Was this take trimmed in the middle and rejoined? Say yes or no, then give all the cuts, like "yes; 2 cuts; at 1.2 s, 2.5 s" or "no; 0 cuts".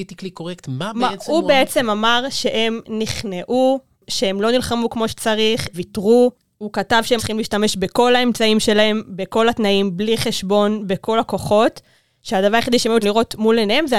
yes; 3 cuts; at 5.7 s, 7.2 s, 13.0 s